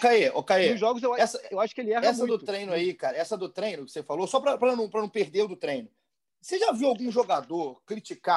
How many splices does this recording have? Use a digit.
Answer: 0